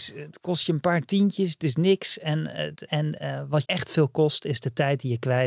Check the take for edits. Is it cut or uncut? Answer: cut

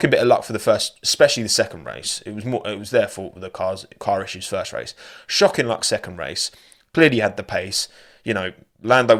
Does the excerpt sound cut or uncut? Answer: uncut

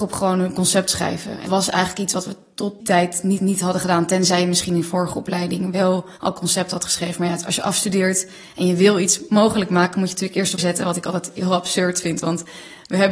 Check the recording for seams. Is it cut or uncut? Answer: cut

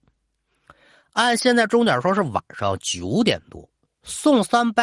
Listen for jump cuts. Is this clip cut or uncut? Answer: uncut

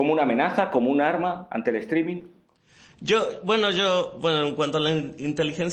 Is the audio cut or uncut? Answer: uncut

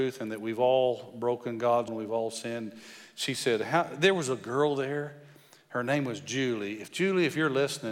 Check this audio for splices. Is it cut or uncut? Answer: cut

